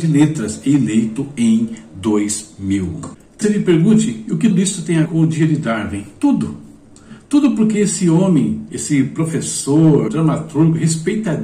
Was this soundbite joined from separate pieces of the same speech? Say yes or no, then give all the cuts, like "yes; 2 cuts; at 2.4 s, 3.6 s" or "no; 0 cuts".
yes; 5 cuts; at 3.4 s, 4.5 s, 5.1 s, 8.7 s, 10.1 s